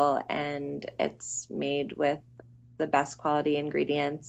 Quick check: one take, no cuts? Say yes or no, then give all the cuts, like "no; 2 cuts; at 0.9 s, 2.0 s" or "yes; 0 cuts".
yes; 0 cuts